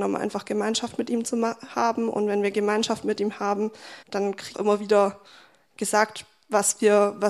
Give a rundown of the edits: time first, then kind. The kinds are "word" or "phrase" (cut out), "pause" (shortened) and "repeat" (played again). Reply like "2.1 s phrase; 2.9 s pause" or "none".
4.0 s pause; 4.5 s phrase